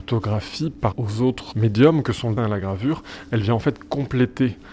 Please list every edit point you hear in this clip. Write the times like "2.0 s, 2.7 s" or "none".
0.9 s, 1.5 s, 2.4 s

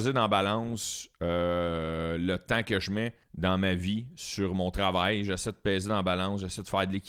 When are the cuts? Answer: 3.2 s

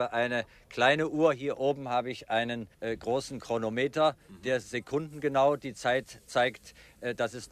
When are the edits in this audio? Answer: 2.7 s

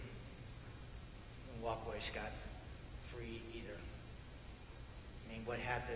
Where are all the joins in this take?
none

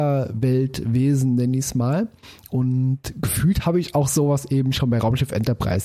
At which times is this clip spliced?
none

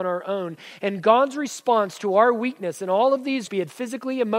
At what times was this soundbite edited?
3.5 s

